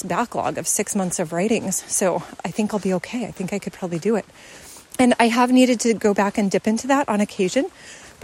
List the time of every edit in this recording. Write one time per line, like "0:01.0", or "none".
0:04.9